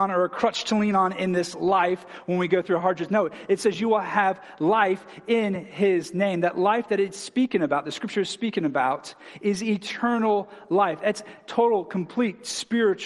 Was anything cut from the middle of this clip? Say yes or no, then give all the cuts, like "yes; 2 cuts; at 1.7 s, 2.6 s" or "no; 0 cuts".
no; 0 cuts